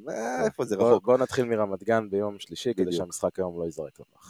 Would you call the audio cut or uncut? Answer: uncut